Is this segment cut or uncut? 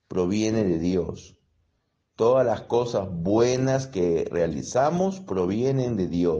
uncut